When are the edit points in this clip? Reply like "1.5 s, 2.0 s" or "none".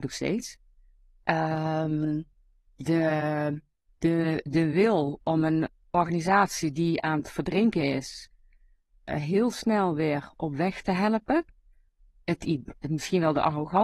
none